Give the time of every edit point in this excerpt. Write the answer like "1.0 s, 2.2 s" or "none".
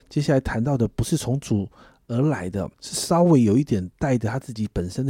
2.7 s